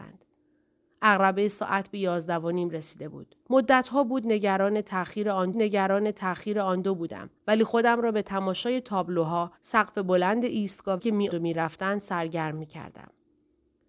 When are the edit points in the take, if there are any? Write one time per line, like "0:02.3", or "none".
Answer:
0:03.4
0:05.5
0:07.4
0:09.6
0:11.0
0:11.3